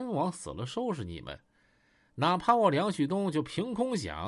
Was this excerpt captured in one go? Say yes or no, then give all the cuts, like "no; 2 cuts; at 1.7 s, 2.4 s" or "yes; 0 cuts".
yes; 0 cuts